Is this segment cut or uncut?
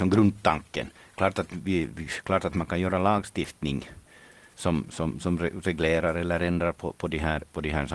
uncut